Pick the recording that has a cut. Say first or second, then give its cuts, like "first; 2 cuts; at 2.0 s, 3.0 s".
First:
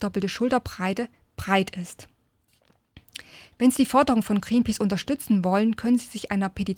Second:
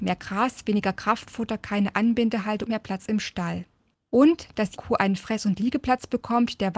second; 3 cuts; at 2.7 s, 3.9 s, 4.8 s